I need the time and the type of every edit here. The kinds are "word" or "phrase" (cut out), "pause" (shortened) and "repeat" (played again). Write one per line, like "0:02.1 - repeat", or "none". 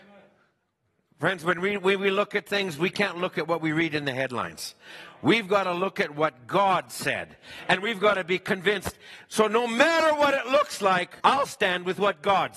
0:11.2 - pause